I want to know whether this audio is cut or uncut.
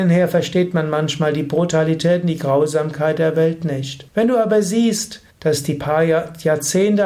cut